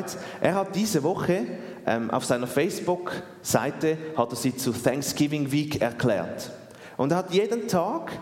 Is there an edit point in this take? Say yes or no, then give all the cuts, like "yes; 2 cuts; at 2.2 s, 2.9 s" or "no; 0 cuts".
no; 0 cuts